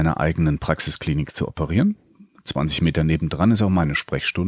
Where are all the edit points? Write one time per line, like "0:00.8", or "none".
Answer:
none

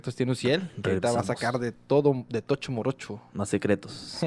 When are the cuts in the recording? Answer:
none

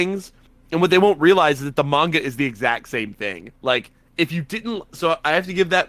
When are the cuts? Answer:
0:03.6

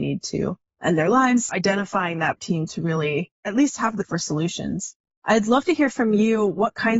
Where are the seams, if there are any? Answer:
0:01.5
0:02.4
0:04.0

